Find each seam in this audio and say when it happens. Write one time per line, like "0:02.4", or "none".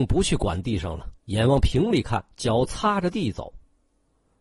0:01.2
0:02.3